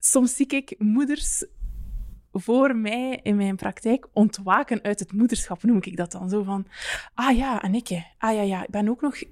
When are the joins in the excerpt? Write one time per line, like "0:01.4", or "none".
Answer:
none